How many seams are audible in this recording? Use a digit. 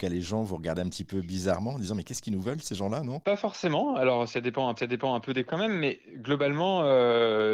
2